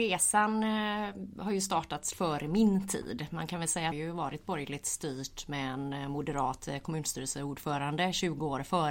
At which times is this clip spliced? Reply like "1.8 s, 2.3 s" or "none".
2.1 s, 3.9 s